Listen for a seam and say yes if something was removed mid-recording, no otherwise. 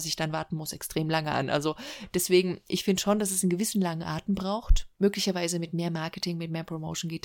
yes